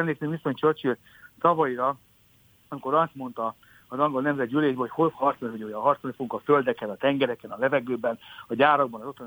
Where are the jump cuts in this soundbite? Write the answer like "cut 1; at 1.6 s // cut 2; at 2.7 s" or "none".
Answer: cut 1; at 5.1 s